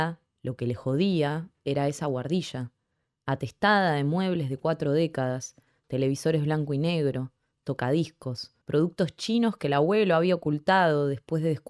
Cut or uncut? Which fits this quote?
cut